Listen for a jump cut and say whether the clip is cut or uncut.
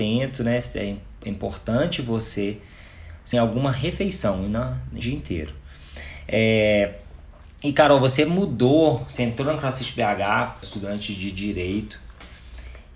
cut